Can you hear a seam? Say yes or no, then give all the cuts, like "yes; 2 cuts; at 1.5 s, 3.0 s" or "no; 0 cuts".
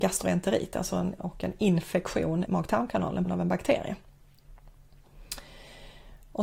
yes; 3 cuts; at 1.2 s, 2.5 s, 3.2 s